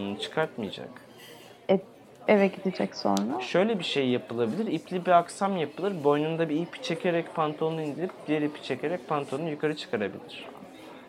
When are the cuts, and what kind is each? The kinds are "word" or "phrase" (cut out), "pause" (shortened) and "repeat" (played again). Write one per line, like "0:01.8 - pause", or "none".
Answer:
0:02.3 - word

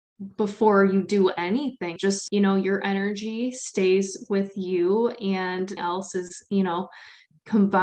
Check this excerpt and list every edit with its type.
0:02.0 - word
0:02.3 - word
0:05.8 - word

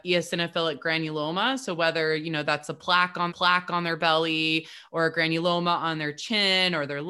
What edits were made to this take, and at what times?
0:03.3 - repeat

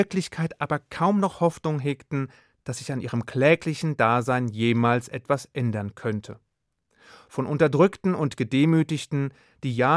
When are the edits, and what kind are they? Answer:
none

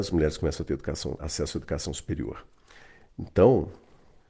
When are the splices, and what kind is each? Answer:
0:01.2 - word

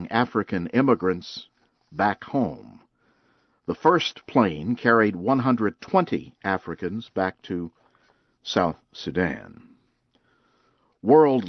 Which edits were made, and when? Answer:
none

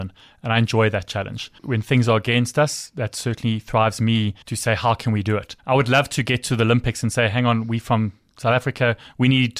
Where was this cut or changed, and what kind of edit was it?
0:01.6 - pause
0:04.4 - pause
0:05.6 - pause

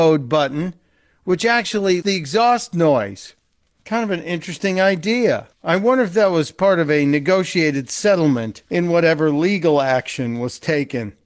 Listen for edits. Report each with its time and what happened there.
0:02.0 - word
0:03.6 - pause
0:05.5 - pause
0:08.7 - pause

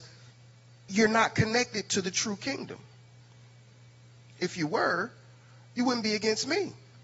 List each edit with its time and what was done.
none

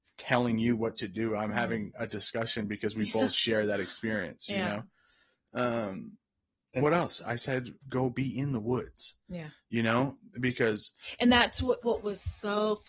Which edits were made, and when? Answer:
0:06.8 - word
0:07.8 - word
0:11.8 - word

